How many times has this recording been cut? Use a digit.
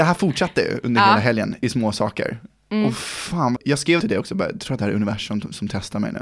2